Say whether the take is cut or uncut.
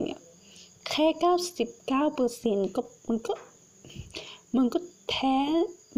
cut